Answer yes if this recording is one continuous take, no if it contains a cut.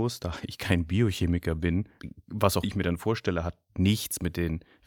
no